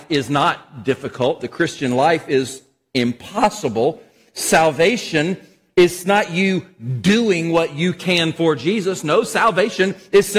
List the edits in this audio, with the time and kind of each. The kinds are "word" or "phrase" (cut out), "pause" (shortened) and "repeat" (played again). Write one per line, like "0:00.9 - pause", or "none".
none